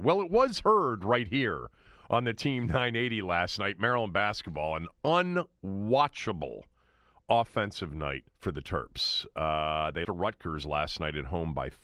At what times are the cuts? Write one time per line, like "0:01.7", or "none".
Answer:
0:08.3
0:10.0